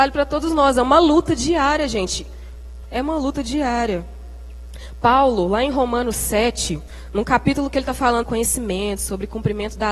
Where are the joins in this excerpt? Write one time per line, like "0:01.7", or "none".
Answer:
0:08.2